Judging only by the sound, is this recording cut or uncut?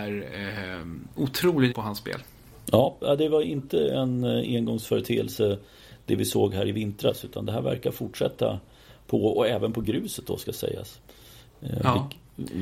cut